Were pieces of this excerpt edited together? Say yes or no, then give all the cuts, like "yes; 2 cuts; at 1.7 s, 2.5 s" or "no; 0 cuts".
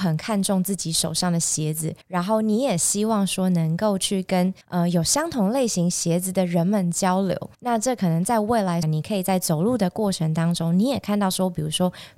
yes; 4 cuts; at 2.0 s, 4.6 s, 7.5 s, 8.8 s